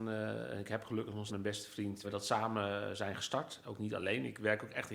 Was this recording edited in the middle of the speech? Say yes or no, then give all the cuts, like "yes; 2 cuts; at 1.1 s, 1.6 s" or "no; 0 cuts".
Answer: yes; 2 cuts; at 1.3 s, 2.0 s